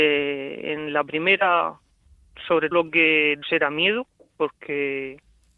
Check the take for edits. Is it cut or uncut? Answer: cut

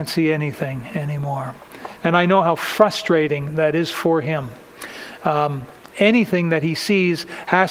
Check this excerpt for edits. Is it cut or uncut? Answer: uncut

